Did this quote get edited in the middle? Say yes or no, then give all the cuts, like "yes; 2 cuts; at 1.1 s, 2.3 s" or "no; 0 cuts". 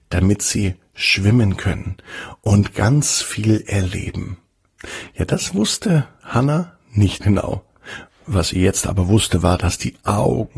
yes; 1 cut; at 7.2 s